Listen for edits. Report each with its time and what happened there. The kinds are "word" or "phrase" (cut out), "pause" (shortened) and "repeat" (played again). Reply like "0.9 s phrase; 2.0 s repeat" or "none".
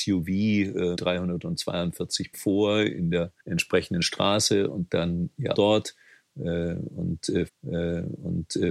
1.0 s word; 2.3 s word; 3.4 s pause; 4.9 s word; 5.5 s word; 7.5 s repeat